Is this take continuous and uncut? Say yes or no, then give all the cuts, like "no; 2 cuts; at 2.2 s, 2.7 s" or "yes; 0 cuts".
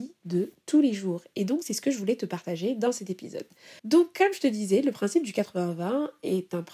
no; 1 cut; at 3.8 s